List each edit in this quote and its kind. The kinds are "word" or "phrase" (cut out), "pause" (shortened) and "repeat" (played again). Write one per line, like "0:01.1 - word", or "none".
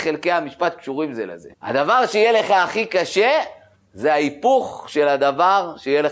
0:01.5 - pause
0:03.8 - pause